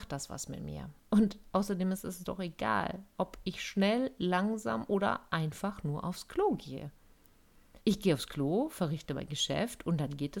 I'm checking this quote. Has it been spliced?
yes; 2 cuts; at 1.0 s, 7.8 s

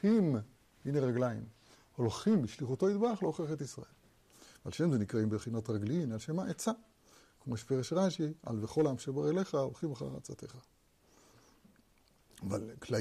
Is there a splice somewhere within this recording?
no; 0 cuts

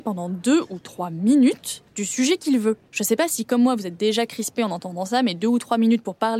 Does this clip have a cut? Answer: yes; 2 cuts; at 1.9 s, 2.9 s

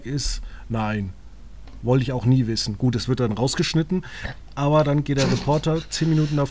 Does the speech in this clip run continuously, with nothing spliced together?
yes; 0 cuts

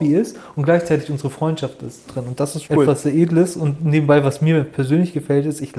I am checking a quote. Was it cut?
yes; 2 cuts; at 2.0 s, 2.6 s

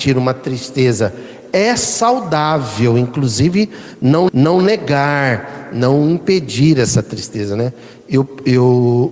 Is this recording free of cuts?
no; 1 cut; at 4.3 s

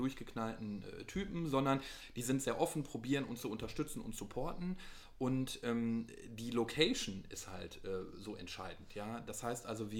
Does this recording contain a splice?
no; 0 cuts

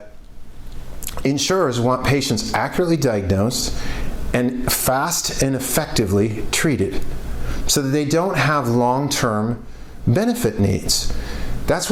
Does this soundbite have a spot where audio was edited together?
no; 0 cuts

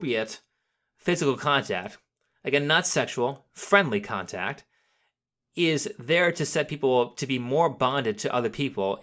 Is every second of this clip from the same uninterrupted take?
yes; 0 cuts

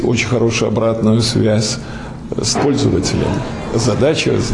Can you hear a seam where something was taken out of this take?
yes; 1 cut; at 2.5 s

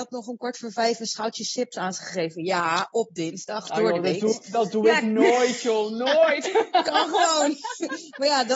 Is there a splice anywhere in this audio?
no; 0 cuts

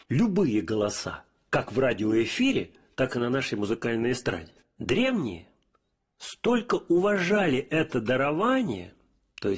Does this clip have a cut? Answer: no; 0 cuts

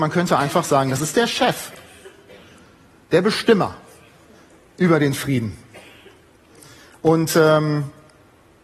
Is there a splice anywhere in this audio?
no; 0 cuts

